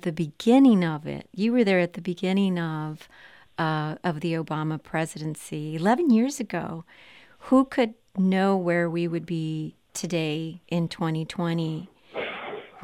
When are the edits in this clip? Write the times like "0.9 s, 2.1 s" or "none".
10.6 s